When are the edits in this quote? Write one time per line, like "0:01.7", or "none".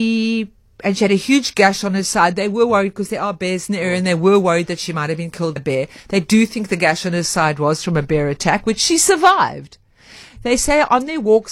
0:05.6